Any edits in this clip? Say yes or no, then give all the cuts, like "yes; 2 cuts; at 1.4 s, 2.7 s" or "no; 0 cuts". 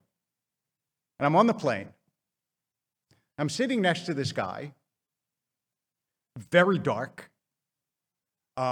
no; 0 cuts